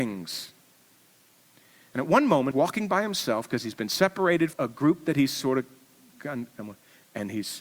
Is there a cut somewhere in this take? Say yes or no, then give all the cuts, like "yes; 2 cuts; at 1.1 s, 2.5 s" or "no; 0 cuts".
yes; 2 cuts; at 2.5 s, 4.5 s